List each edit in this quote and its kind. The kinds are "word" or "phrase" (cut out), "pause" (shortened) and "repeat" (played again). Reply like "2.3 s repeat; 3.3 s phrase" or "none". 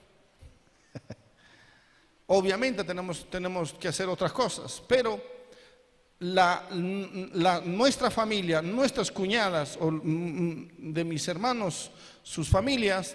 none